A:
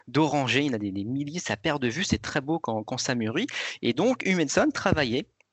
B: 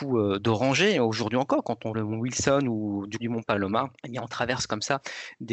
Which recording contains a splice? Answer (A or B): B